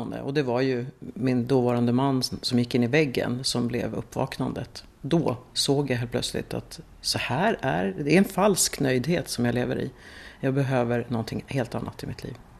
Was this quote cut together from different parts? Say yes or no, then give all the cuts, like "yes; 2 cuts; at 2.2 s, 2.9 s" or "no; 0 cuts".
no; 0 cuts